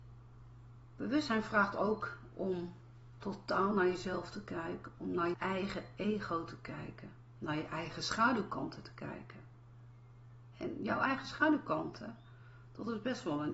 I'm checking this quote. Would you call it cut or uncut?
cut